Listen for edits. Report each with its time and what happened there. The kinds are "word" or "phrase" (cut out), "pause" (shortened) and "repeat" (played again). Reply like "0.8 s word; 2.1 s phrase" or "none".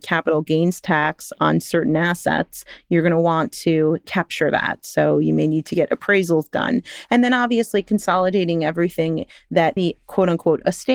9.8 s phrase